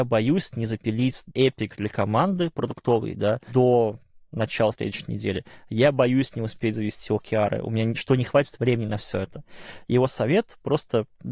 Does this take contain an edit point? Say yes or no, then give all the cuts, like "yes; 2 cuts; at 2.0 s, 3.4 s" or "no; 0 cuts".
no; 0 cuts